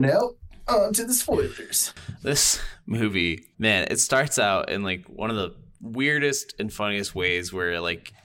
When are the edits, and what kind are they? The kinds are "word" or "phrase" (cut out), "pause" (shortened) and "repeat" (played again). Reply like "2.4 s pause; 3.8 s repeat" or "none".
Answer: 3.5 s pause